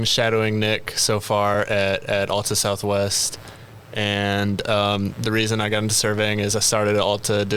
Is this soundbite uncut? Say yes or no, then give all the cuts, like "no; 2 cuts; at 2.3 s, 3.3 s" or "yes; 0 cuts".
yes; 0 cuts